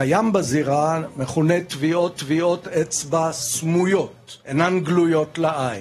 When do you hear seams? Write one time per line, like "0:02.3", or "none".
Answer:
0:02.1
0:04.4